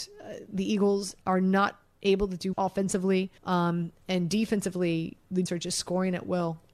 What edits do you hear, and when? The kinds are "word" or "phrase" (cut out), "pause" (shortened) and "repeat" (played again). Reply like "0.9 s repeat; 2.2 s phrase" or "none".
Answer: 1.2 s pause; 2.5 s word; 3.4 s pause; 5.5 s word